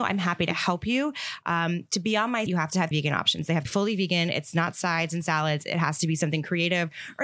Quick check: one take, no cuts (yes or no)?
no